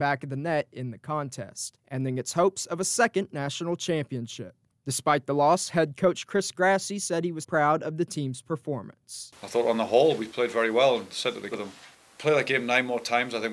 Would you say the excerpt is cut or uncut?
cut